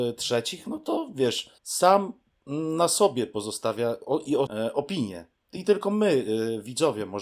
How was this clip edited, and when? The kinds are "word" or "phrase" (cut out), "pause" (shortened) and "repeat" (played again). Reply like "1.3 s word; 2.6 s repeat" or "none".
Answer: 1.6 s pause; 4.5 s word